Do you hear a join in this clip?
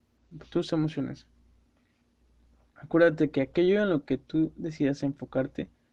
no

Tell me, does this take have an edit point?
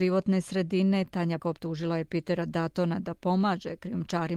yes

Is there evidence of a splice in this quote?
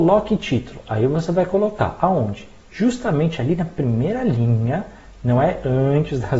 no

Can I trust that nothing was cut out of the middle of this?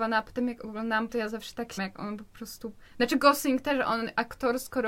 no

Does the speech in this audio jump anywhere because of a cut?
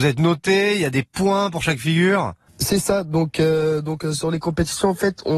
no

